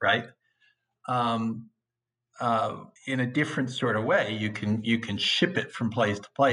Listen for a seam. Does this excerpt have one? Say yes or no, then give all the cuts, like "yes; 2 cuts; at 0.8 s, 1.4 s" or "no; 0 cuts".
yes; 1 cut; at 3.0 s